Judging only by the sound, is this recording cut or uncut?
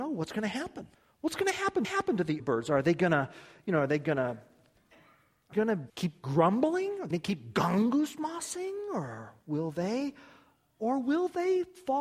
cut